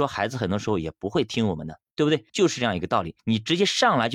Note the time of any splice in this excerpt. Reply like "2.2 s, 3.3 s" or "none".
2.3 s, 3.2 s